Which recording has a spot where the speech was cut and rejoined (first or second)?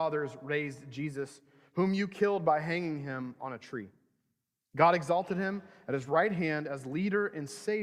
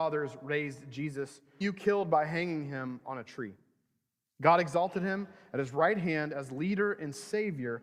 second